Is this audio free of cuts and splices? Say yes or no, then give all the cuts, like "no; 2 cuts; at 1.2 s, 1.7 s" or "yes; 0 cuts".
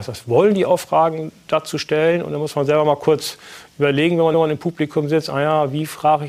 no; 1 cut; at 4.3 s